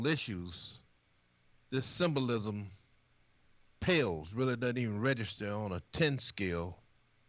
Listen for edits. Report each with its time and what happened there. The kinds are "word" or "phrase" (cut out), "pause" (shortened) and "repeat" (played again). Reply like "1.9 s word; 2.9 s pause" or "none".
none